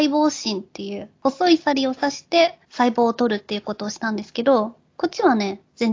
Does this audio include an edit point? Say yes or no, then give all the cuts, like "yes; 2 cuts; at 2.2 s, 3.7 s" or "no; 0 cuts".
no; 0 cuts